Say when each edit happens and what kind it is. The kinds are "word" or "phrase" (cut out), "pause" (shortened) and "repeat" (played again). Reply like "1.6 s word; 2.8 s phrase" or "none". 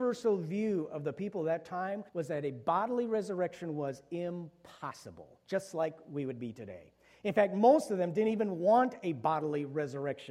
2.1 s pause